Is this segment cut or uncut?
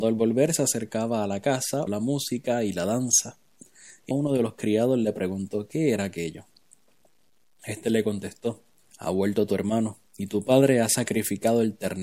cut